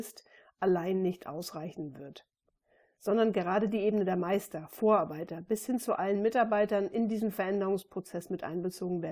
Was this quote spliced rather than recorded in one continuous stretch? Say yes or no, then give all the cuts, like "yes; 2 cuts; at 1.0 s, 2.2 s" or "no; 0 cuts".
no; 0 cuts